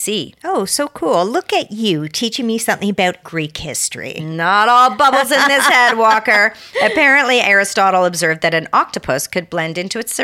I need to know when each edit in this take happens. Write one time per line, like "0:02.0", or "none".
0:03.2

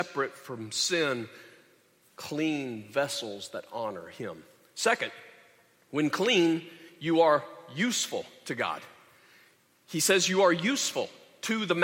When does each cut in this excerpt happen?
none

